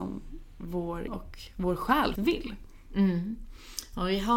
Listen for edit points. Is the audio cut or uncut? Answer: cut